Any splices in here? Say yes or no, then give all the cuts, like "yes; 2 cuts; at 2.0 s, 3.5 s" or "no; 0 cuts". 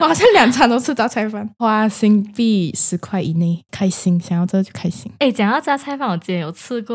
yes; 1 cut; at 3.7 s